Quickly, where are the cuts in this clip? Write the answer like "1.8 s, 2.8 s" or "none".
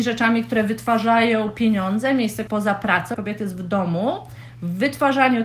2.5 s, 3.1 s